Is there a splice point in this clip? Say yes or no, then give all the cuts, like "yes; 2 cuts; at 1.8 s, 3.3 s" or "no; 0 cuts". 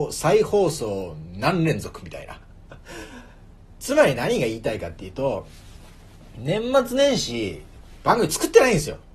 no; 0 cuts